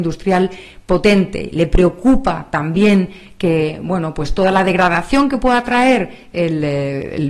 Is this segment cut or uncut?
uncut